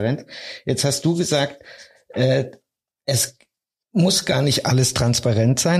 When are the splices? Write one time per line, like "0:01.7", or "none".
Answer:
none